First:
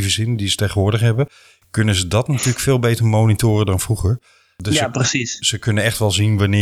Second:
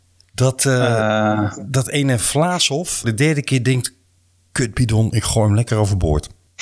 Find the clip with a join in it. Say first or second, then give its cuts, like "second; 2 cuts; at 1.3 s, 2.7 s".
second; 1 cut; at 3.0 s